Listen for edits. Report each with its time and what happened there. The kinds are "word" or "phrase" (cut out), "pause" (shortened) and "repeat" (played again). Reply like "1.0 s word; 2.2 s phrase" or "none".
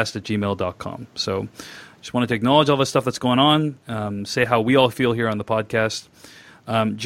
none